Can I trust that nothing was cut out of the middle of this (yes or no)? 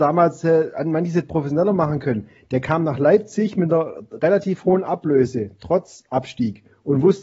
yes